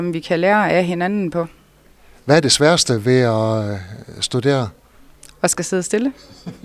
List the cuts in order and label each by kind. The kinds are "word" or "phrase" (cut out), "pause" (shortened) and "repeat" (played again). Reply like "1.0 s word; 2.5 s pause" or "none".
none